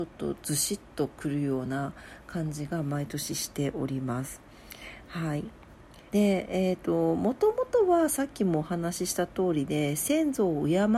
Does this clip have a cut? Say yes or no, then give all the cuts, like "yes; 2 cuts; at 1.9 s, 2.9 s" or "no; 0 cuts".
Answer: yes; 1 cut; at 6.1 s